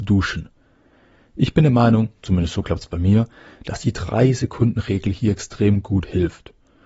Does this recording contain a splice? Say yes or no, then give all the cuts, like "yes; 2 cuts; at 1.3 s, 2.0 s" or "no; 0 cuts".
no; 0 cuts